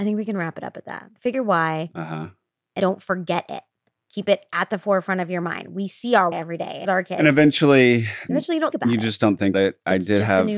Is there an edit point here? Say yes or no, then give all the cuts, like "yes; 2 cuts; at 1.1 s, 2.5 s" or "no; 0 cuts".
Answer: yes; 7 cuts; at 1.3 s, 2.8 s, 6.3 s, 6.8 s, 8.3 s, 8.7 s, 9.5 s